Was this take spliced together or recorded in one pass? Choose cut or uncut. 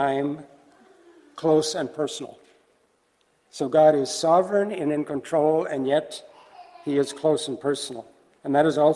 uncut